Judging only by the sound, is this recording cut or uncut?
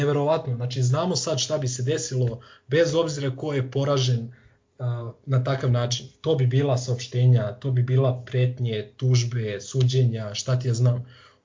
uncut